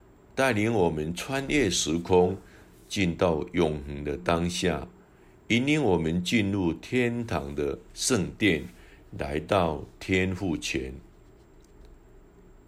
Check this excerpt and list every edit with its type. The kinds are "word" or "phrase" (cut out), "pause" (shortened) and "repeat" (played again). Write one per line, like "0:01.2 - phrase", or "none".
none